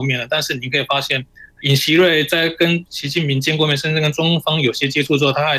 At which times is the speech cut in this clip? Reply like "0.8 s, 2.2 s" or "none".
1.5 s